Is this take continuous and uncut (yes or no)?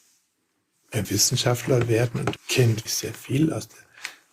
no